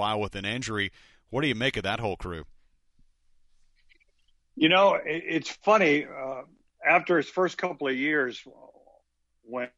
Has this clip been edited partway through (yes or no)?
no